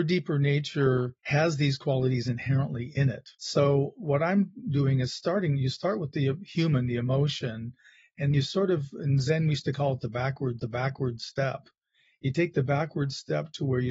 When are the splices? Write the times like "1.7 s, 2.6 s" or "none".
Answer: 1.2 s, 3.3 s, 8.3 s, 10.6 s